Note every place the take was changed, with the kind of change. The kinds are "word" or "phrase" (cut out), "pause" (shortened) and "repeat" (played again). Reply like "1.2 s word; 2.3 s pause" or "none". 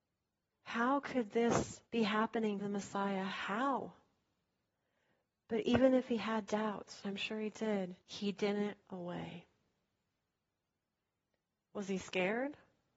1.9 s pause; 2.6 s word; 4.7 s pause; 7.0 s word; 8.0 s pause; 8.8 s word